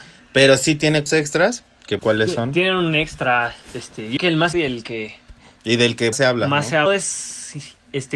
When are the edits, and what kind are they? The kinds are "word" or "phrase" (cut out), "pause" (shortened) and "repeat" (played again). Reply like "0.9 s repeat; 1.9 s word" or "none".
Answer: 1.1 s word; 2.0 s word; 4.2 s word; 4.5 s word; 6.1 s word; 6.9 s word

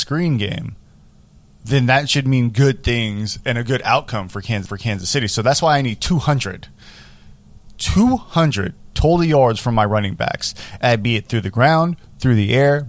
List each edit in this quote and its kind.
4.6 s repeat

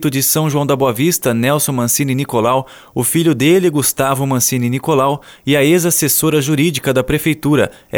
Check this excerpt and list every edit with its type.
none

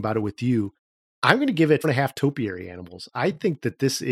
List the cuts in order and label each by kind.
1.8 s word

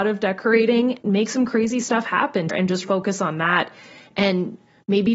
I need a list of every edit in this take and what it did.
1.0 s word; 2.5 s word; 2.8 s word

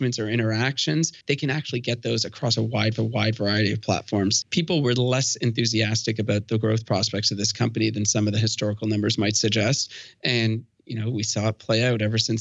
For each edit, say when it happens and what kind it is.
1.2 s pause; 3.0 s repeat; 4.4 s word

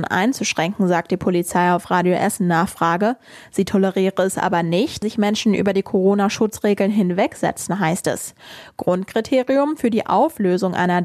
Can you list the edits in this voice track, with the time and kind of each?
5.0 s word

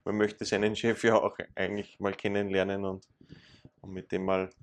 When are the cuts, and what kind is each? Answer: none

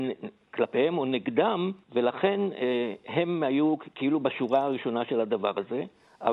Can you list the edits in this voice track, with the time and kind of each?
1.8 s pause

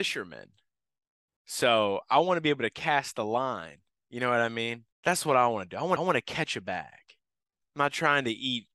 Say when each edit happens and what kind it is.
4.9 s pause; 6.0 s repeat

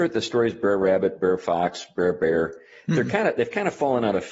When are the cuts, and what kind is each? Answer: none

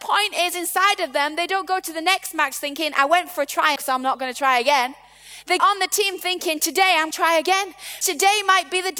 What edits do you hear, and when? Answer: 3.8 s phrase; 5.6 s word; 7.1 s word; 8.0 s word

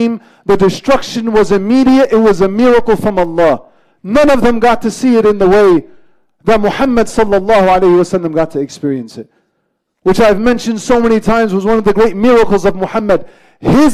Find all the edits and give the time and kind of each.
none

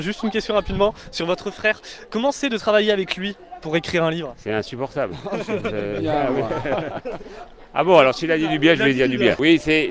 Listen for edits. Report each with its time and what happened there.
none

